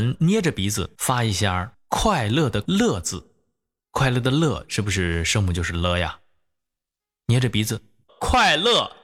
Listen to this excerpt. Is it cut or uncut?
cut